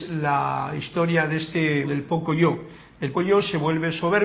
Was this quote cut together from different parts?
yes; 2 cuts; at 1.8 s, 3.1 s

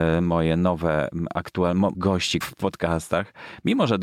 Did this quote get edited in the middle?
yes; 2 cuts; at 1.9 s, 2.4 s

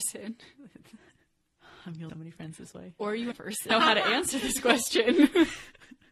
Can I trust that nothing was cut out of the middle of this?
no; 3 cuts; at 2.1 s, 3.3 s, 3.7 s

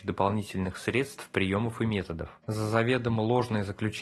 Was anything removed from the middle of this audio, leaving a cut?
no; 0 cuts

